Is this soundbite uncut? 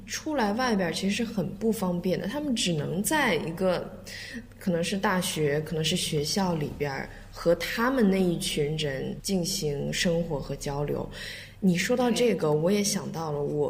yes; 0 cuts

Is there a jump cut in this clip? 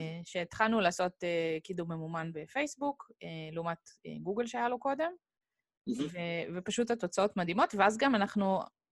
no; 0 cuts

